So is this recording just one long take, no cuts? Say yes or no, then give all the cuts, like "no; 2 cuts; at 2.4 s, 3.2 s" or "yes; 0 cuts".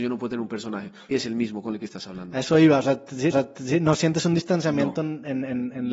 no; 2 cuts; at 1.1 s, 3.3 s